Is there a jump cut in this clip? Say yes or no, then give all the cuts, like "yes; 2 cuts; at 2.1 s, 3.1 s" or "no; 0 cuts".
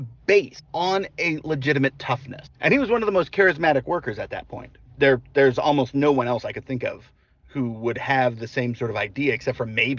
no; 0 cuts